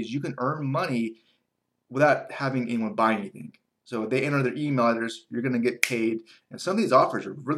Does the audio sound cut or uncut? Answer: uncut